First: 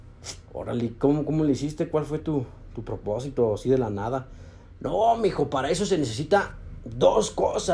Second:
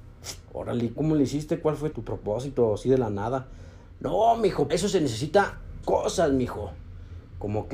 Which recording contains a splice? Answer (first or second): second